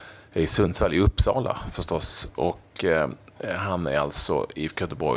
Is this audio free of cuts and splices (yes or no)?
yes